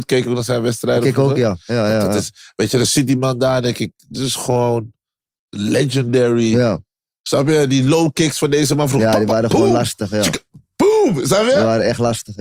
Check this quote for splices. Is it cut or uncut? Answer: uncut